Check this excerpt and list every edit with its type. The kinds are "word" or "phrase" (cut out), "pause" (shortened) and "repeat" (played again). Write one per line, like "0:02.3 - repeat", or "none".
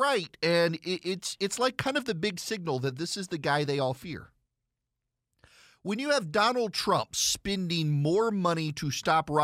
none